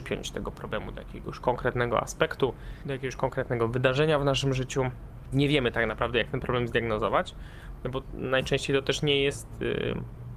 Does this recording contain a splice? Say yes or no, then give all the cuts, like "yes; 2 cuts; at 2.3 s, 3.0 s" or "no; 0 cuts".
no; 0 cuts